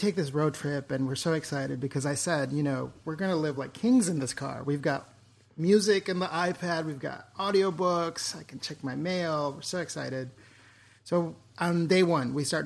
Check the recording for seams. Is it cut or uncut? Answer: uncut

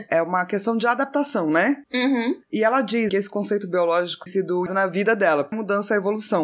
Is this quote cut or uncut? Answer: cut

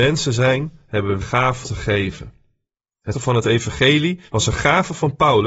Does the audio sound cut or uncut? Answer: cut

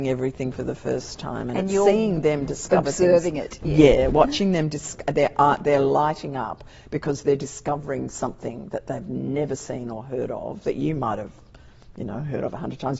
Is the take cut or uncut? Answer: uncut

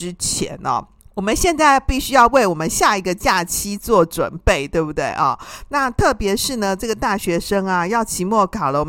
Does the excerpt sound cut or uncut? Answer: cut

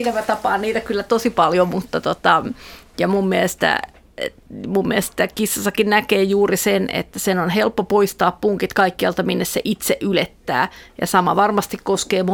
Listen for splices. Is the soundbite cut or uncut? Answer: uncut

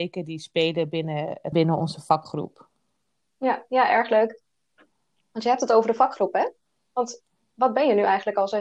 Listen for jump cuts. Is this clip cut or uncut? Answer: cut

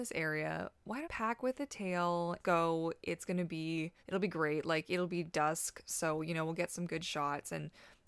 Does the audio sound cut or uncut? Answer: cut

